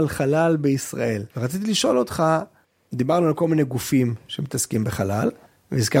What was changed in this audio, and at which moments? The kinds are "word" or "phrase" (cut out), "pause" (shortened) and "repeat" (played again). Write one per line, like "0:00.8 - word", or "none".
0:01.3 - pause
0:02.6 - pause